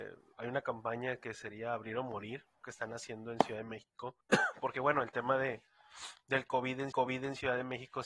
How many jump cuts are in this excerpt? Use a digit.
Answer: 3